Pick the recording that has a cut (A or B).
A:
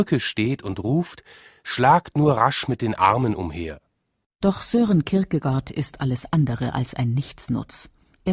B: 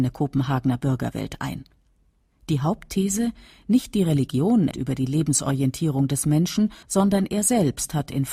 B